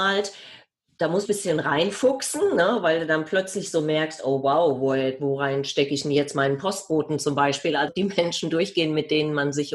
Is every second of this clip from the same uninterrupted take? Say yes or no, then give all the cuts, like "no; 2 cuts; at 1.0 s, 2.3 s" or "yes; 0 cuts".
no; 2 cuts; at 1.2 s, 7.9 s